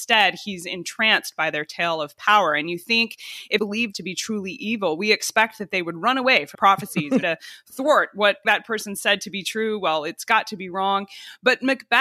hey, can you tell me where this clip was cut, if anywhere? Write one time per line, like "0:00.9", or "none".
0:03.6
0:03.9
0:06.5
0:07.2
0:08.4